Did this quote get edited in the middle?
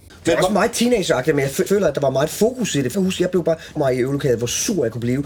yes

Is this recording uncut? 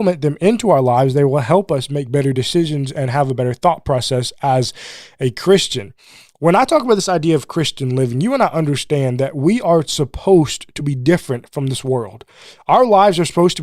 yes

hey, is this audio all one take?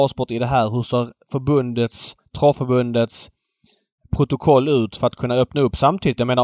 yes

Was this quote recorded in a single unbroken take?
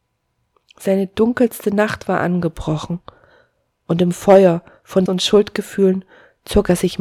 no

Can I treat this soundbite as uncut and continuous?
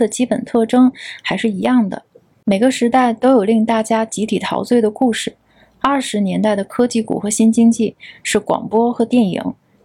yes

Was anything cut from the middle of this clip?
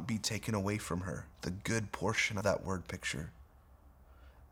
yes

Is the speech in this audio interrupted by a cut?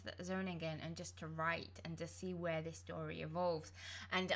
no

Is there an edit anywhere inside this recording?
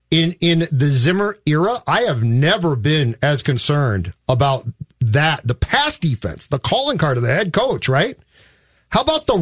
no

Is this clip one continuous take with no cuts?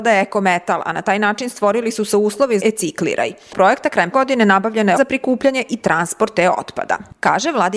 no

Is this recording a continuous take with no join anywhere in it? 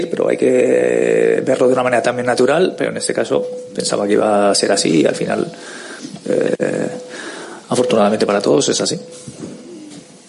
no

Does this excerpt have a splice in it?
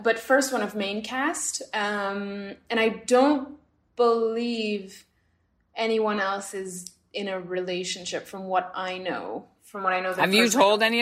no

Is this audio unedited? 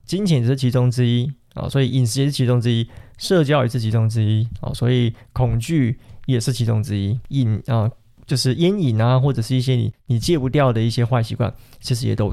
yes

